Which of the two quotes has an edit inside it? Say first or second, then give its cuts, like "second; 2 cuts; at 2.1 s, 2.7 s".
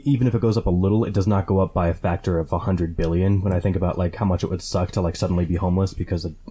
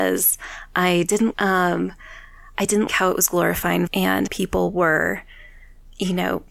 second; 4 cuts; at 1.3 s, 2.9 s, 3.9 s, 4.3 s